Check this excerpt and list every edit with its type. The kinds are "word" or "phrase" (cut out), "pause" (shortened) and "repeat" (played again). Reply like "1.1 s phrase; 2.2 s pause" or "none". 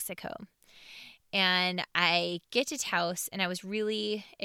none

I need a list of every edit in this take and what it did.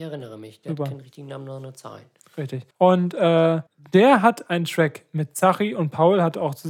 2.7 s pause; 3.7 s pause

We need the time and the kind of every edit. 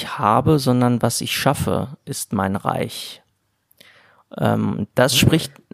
none

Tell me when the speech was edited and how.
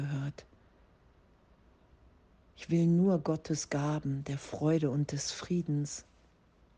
none

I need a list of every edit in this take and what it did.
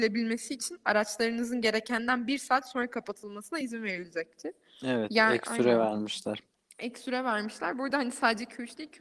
none

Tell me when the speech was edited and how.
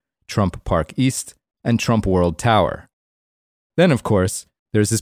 none

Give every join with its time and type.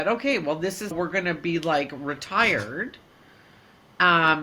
0.9 s word

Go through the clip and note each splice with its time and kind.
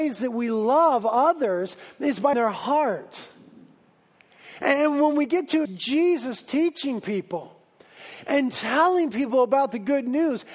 2.3 s word; 5.7 s word

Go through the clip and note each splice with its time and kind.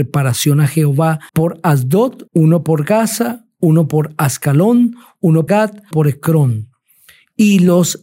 1.3 s pause; 2.3 s pause; 5.5 s word; 5.9 s word

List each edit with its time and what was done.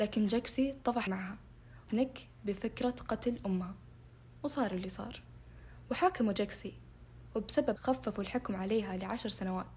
1.1 s word; 1.9 s word; 7.8 s word

